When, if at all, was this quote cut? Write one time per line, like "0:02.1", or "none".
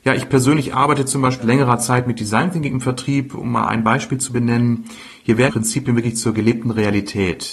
0:01.4
0:05.5

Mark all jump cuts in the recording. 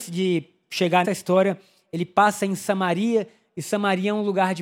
0:01.0

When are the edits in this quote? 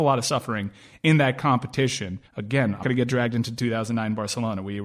0:02.3
0:02.8

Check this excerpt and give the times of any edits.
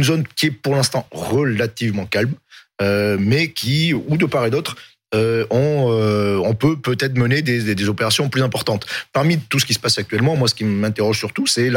none

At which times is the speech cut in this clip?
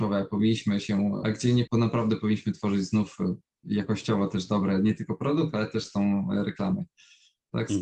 0:01.2
0:01.7

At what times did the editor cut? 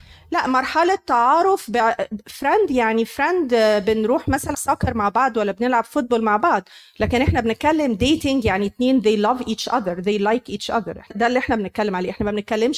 0:04.5
0:11.1

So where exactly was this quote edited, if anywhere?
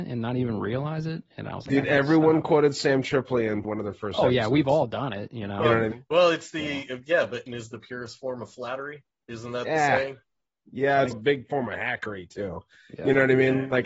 0:03.6
0:05.9
0:07.5
0:11.1

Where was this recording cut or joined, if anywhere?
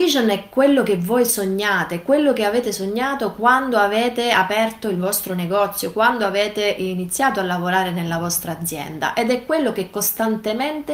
none

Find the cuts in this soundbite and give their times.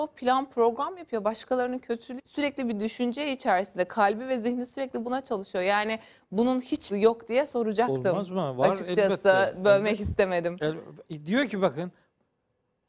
0:02.2
0:06.9

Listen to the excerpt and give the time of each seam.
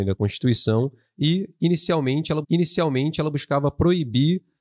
0:02.4

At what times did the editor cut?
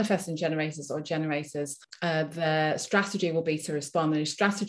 0:01.8

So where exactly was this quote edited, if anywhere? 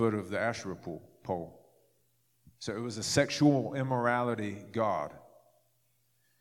none

